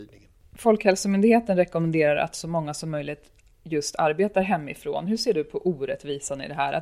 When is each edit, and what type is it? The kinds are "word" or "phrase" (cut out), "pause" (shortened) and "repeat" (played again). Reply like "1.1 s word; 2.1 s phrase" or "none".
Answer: none